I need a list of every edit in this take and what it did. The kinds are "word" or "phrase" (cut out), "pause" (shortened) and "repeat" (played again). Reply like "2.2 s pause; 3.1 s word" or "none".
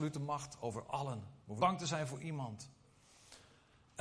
1.6 s word

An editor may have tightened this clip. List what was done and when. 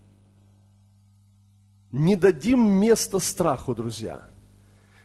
none

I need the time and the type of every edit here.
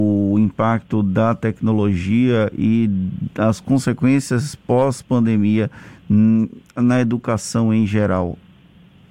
none

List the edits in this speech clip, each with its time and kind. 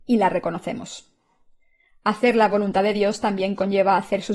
none

